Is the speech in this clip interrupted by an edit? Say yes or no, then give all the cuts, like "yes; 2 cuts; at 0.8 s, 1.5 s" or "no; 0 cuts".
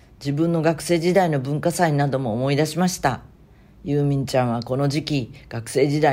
no; 0 cuts